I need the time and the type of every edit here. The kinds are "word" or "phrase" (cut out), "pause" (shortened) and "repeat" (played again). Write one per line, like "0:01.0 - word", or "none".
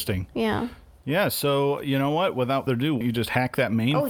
0:02.7 - word
0:03.0 - word